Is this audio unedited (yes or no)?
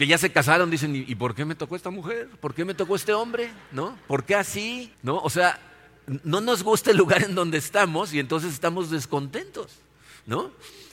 no